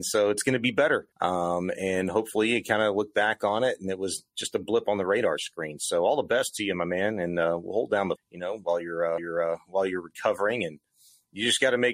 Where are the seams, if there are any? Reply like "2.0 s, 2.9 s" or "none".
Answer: 1.1 s, 8.2 s, 9.2 s